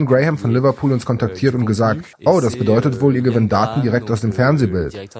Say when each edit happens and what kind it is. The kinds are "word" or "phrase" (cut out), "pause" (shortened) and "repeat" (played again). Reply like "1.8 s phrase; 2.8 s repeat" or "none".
2.1 s pause